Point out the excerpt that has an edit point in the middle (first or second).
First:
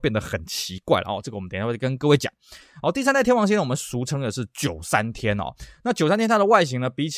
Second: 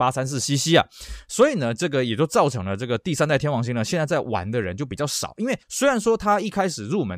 second